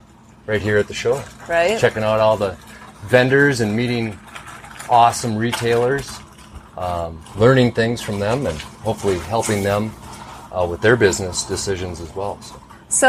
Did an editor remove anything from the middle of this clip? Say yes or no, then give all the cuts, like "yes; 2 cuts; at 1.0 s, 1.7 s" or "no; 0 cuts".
yes; 1 cut; at 6.7 s